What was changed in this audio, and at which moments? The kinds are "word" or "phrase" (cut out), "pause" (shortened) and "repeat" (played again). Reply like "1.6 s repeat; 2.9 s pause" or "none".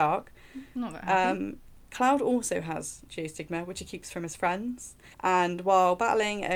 5.1 s pause